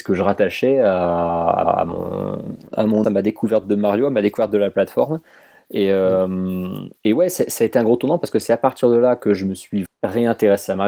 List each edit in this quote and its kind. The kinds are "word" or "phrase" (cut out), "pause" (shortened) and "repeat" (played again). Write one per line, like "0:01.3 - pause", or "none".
0:01.6 - repeat
0:03.0 - word
0:07.0 - pause
0:09.9 - word